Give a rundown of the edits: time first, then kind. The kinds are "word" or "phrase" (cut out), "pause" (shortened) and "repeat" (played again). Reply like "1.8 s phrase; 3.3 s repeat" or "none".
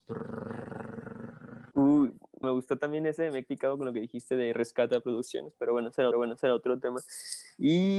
2.4 s word; 3.4 s word; 6.1 s repeat